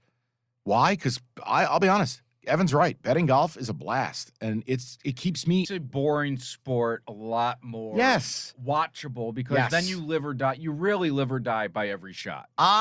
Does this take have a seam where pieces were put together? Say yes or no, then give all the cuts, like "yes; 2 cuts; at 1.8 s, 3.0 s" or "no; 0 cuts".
yes; 1 cut; at 5.6 s